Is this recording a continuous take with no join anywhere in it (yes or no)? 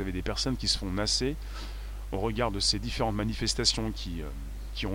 yes